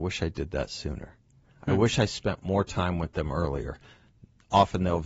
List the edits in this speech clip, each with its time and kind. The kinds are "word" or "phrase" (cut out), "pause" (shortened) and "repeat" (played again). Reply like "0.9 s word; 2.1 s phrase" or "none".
none